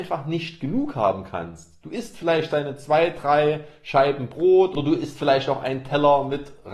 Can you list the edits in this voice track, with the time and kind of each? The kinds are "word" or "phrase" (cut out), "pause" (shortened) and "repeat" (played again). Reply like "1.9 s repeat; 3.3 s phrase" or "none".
none